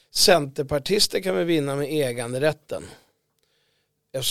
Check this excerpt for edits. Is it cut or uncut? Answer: uncut